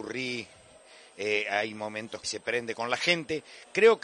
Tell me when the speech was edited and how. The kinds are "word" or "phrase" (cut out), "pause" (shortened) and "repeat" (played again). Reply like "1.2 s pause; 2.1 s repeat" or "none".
2.2 s word